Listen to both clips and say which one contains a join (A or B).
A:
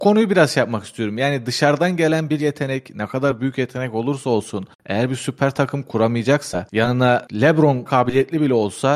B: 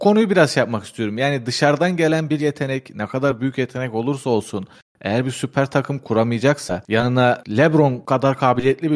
A